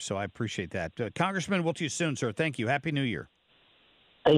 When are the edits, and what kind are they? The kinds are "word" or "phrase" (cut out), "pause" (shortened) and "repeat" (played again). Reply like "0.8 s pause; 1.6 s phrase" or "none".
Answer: 1.7 s word